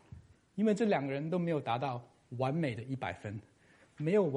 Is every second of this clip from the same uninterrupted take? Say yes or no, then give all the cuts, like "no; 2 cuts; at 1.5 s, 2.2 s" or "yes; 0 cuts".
yes; 0 cuts